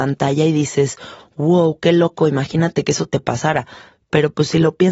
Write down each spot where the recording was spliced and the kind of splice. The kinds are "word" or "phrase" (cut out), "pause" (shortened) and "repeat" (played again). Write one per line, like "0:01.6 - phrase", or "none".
none